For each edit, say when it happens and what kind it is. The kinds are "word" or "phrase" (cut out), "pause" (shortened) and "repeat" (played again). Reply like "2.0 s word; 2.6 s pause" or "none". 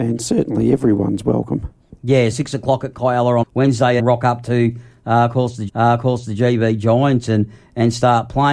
2.3 s word; 3.4 s word; 4.0 s phrase; 5.7 s repeat